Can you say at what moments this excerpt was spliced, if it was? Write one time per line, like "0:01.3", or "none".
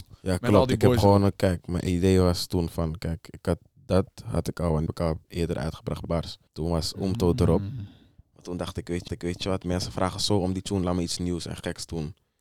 0:04.9
0:06.0
0:06.5
0:09.1